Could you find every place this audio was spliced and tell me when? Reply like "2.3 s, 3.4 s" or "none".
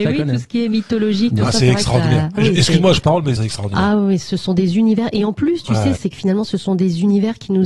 2.4 s, 3.0 s, 3.4 s, 6.0 s